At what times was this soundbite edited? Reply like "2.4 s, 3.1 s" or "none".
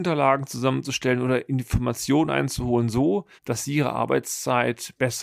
3.4 s